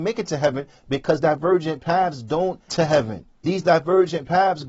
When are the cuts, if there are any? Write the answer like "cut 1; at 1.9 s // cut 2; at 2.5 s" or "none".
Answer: cut 1; at 1.2 s // cut 2; at 2.7 s // cut 3; at 3.3 s